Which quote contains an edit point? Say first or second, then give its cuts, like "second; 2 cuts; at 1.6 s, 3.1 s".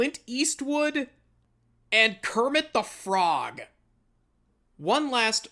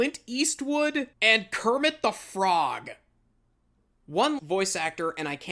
second; 2 cuts; at 1.1 s, 4.4 s